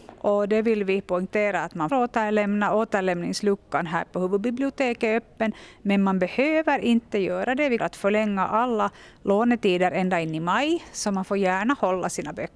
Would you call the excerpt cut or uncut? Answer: cut